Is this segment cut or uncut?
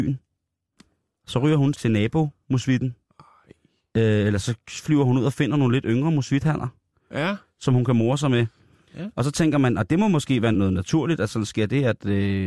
cut